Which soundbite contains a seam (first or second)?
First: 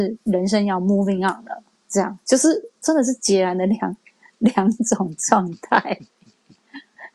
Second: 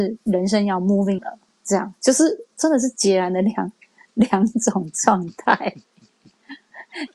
second